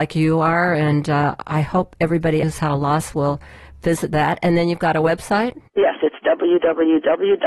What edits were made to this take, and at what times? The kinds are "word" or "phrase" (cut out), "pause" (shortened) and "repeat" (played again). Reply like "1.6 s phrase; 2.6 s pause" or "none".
2.4 s phrase; 5.7 s pause